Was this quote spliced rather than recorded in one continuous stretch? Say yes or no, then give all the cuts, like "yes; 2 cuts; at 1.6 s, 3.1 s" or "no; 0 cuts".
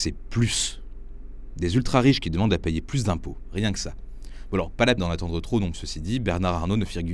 yes; 2 cuts; at 5.0 s, 5.7 s